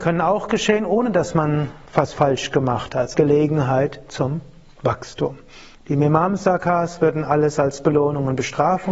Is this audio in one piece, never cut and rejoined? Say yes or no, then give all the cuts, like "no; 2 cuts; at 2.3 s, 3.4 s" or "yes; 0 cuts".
no; 1 cut; at 3.1 s